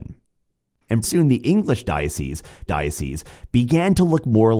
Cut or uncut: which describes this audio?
cut